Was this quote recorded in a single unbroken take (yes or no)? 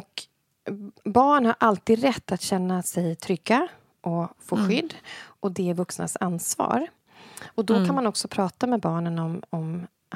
yes